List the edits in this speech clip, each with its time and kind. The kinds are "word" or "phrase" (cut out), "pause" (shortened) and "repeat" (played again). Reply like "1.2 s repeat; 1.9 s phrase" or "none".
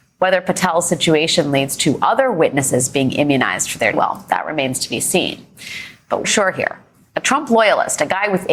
3.9 s word; 6.2 s phrase